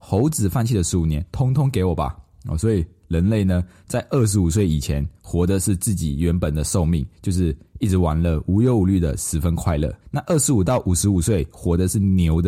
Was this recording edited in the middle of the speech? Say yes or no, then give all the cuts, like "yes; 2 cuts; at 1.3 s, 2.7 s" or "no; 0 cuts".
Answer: yes; 2 cuts; at 7.1 s, 10.0 s